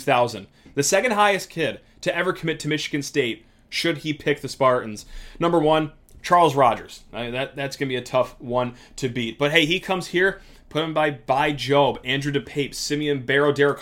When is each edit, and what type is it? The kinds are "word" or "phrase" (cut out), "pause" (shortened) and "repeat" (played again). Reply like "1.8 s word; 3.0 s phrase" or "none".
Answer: none